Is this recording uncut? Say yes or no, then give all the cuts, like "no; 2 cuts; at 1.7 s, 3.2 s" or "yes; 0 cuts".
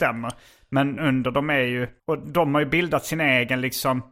no; 2 cuts; at 1.0 s, 2.0 s